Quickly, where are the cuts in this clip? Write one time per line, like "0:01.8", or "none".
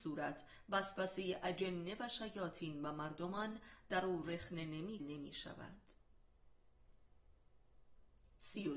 0:05.0